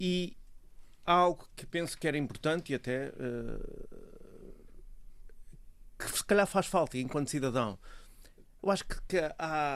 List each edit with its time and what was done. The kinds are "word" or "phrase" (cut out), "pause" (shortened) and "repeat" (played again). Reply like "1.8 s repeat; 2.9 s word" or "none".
none